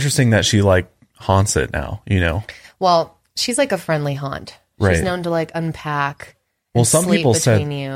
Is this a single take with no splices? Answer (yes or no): yes